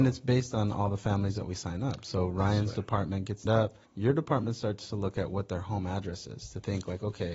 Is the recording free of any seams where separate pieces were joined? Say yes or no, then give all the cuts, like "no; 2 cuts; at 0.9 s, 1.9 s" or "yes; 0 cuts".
no; 2 cuts; at 3.5 s, 3.8 s